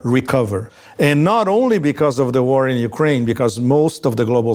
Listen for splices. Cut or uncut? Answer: uncut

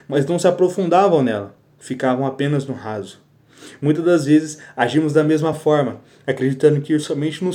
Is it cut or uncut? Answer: uncut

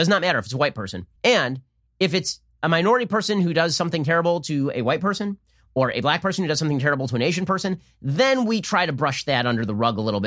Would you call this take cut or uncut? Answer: cut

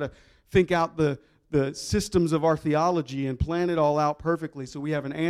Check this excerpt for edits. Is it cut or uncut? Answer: uncut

